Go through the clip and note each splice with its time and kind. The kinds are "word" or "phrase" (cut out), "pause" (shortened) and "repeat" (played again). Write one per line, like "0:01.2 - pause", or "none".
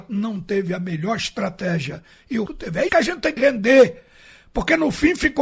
0:02.5 - word
0:02.9 - word
0:03.4 - word